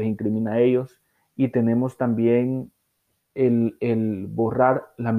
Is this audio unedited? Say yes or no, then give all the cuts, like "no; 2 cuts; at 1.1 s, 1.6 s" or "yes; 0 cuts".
yes; 0 cuts